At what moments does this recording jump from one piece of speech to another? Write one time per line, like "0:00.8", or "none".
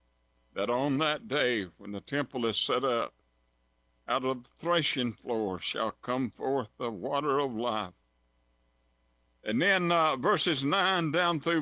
none